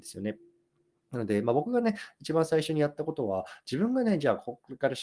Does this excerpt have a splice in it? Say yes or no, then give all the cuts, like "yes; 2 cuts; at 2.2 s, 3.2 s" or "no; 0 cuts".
no; 0 cuts